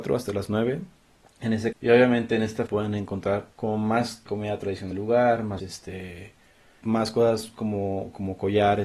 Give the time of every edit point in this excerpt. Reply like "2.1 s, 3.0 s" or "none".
1.2 s, 1.7 s, 2.7 s, 3.5 s, 4.3 s, 4.9 s, 5.6 s, 6.8 s